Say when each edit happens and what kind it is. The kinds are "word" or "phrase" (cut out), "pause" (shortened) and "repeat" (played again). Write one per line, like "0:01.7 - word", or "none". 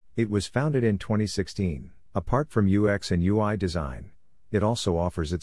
0:02.1 - pause